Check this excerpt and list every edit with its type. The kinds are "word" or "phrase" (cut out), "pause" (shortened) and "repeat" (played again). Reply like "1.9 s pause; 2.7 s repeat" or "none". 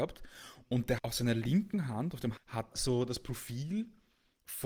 1.0 s word; 2.4 s word; 2.7 s word